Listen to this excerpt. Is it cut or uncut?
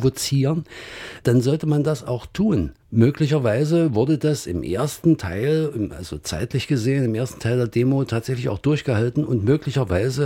cut